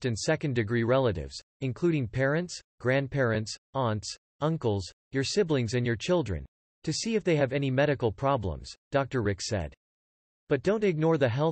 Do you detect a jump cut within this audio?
yes; 1 cut; at 1.5 s

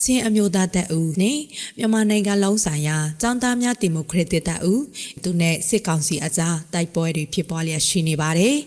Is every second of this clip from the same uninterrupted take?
no; 2 cuts; at 1.1 s, 5.2 s

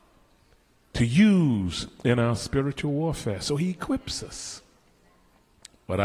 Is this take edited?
no; 0 cuts

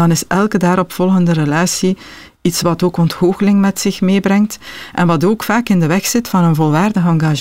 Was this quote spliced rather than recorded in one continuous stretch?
no; 0 cuts

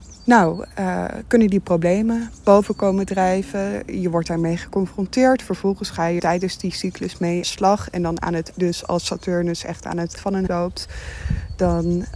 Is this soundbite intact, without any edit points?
no; 5 cuts; at 6.2 s, 7.4 s, 8.5 s, 10.2 s, 10.5 s

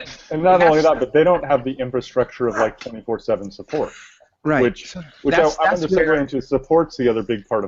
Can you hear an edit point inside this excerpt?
no; 0 cuts

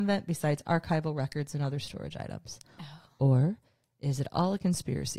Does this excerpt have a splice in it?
no; 0 cuts

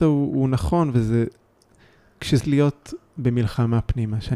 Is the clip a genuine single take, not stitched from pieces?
no; 1 cut; at 2.4 s

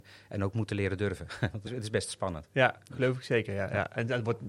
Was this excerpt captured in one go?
no; 1 cut; at 1.7 s

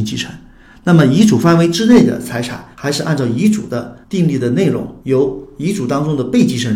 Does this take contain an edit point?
yes; 3 cuts; at 2.7 s, 4.0 s, 5.0 s

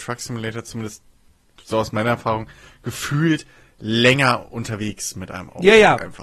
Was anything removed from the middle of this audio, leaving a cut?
no; 0 cuts

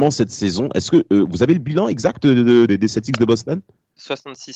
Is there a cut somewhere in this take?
yes; 1 cut; at 2.7 s

